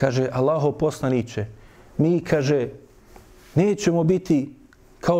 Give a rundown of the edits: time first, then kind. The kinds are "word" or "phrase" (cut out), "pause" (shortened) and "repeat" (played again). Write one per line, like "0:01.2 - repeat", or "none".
none